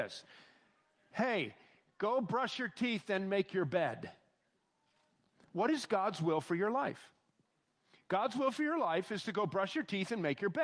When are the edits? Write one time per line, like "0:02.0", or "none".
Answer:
none